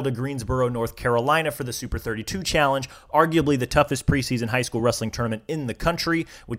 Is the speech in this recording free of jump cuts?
yes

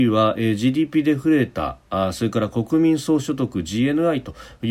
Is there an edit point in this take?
no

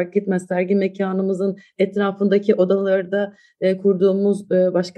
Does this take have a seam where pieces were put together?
no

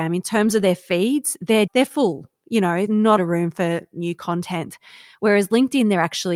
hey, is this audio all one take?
no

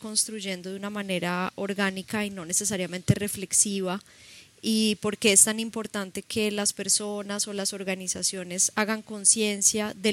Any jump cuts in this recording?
no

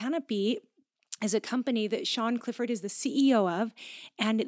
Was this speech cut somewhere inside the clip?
no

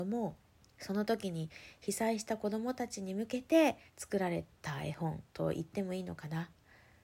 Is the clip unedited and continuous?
no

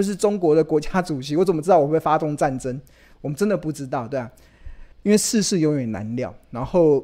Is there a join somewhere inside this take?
yes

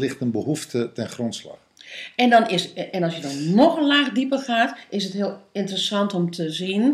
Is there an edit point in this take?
no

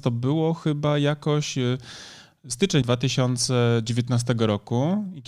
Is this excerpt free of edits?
no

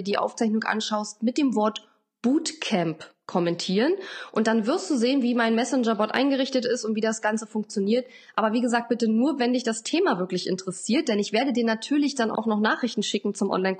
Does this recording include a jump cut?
no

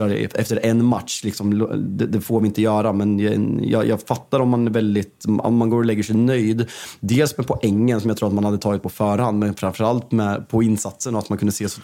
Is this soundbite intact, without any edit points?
yes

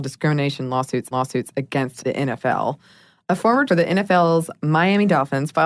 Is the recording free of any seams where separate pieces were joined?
no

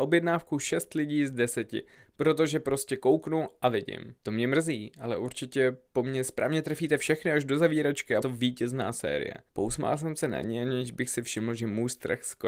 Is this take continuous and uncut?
no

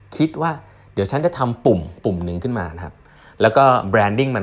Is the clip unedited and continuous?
yes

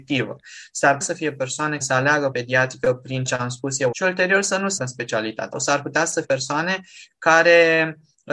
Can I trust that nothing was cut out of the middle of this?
no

